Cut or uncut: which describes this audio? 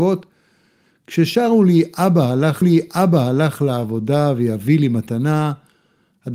cut